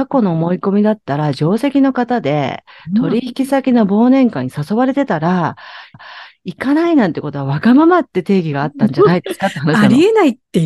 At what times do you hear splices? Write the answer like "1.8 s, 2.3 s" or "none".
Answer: 5.9 s